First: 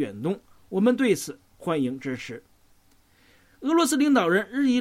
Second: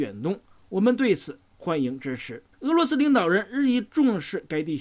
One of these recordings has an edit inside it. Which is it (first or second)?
second